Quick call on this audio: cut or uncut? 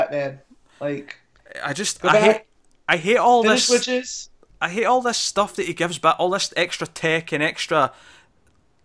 uncut